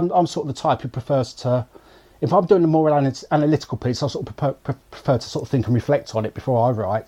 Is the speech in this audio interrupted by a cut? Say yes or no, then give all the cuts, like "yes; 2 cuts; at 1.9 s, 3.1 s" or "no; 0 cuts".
no; 0 cuts